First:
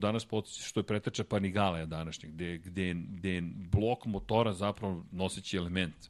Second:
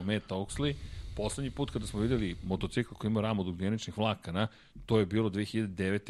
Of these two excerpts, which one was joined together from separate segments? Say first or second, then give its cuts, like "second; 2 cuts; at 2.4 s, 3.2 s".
first; 1 cut; at 3.2 s